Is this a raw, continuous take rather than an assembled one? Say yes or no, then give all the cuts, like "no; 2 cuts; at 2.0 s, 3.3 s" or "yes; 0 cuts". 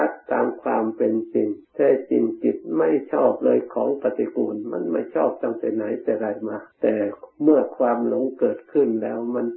no; 2 cuts; at 1.6 s, 6.7 s